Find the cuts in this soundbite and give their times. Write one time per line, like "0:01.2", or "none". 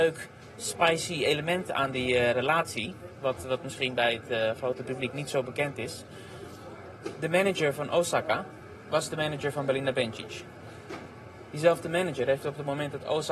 none